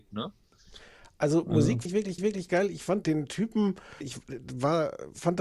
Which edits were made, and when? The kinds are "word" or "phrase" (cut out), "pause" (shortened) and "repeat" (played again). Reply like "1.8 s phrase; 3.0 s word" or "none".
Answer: 1.9 s word; 2.2 s repeat; 3.0 s word; 4.0 s word